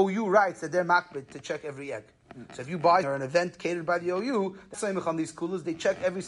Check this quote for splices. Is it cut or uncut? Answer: cut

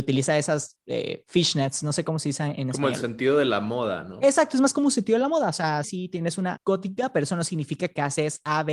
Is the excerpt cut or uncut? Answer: cut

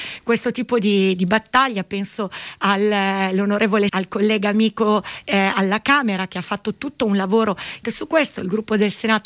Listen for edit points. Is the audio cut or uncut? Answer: cut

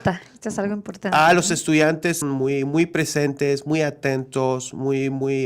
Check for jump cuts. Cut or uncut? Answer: cut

